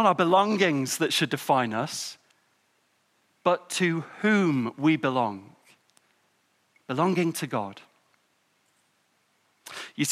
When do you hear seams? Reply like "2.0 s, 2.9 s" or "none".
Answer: none